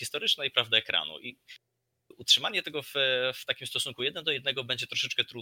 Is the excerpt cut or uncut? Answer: uncut